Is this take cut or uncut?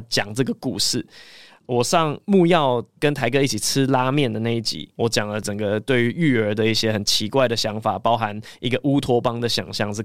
uncut